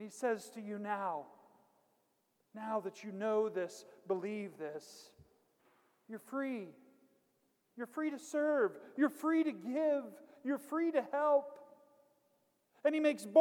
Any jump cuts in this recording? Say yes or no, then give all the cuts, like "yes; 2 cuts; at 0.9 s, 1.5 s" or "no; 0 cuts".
no; 0 cuts